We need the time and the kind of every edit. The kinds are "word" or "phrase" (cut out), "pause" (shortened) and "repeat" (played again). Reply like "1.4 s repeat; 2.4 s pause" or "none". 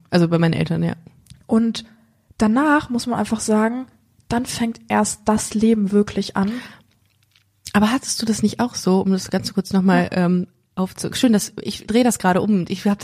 none